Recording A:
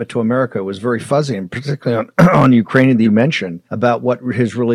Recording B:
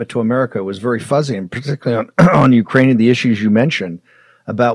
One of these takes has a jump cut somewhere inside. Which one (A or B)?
A